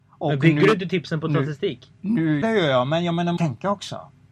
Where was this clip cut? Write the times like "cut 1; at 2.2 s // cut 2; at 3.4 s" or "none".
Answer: cut 1; at 2.4 s // cut 2; at 3.4 s